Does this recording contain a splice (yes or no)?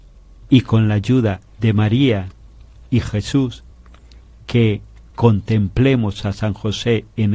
no